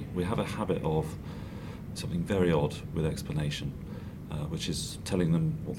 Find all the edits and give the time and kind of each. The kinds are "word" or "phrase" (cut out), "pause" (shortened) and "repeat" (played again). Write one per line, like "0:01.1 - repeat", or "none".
0:02.0 - phrase